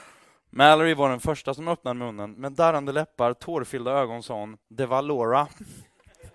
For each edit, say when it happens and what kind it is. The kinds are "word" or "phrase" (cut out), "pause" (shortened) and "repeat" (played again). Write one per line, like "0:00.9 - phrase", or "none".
0:04.6 - pause